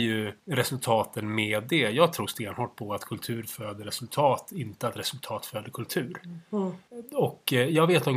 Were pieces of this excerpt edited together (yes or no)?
no